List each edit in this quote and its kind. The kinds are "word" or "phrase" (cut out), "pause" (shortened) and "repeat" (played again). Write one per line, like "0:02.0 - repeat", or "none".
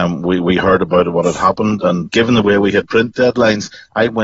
0:02.1 - word